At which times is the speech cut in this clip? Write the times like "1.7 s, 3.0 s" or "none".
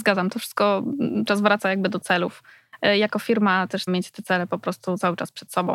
1.3 s, 3.9 s